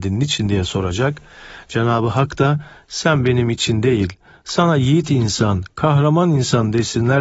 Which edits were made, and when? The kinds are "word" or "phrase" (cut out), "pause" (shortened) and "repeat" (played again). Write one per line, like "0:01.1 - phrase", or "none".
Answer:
none

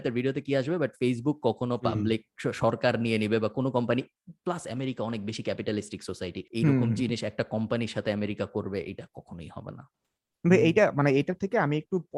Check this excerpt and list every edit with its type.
0:06.5 - pause

